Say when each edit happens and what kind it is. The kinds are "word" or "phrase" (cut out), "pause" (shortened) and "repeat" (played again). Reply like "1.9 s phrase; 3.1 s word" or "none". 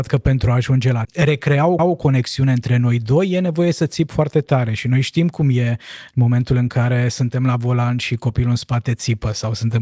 1.0 s phrase; 1.8 s repeat